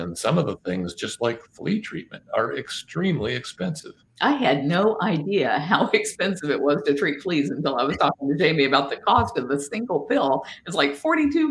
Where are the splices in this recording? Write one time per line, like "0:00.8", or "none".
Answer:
0:04.1